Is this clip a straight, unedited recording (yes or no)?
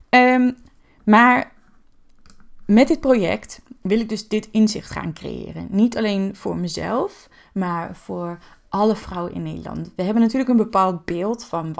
yes